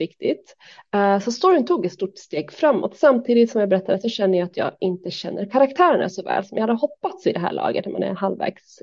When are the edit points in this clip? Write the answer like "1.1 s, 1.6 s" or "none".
none